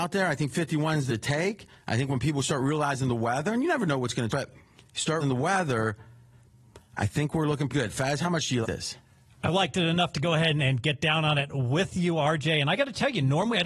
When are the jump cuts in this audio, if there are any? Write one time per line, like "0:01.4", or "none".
0:01.1
0:04.3
0:05.2
0:07.7
0:08.6